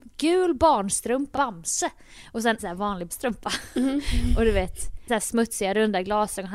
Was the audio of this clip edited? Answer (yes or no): yes